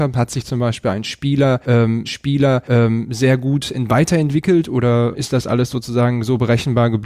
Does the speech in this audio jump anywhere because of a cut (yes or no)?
yes